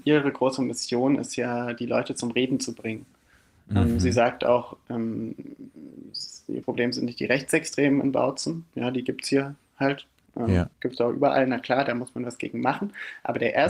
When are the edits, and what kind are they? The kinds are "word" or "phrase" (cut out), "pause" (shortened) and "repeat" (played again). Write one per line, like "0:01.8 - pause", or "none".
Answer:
0:06.6 - word
0:10.3 - pause
0:10.7 - pause